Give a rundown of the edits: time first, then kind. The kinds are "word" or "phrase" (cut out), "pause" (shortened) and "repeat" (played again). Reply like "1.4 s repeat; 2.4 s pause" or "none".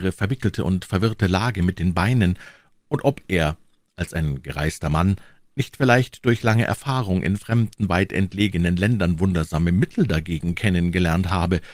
none